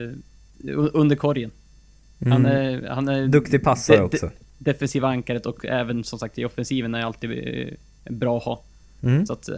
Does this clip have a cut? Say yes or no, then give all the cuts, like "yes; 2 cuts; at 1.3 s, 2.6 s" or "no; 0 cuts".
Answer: no; 0 cuts